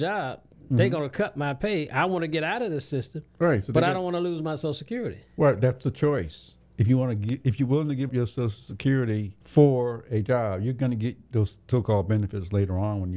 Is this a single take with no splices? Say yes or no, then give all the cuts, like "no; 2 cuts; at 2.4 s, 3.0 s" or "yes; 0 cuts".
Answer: no; 3 cuts; at 3.3 s, 8.1 s, 9.4 s